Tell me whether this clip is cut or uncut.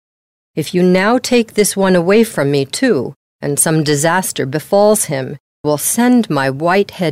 cut